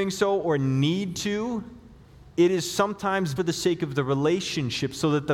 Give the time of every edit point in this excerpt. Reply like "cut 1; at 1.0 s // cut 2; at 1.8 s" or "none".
cut 1; at 3.4 s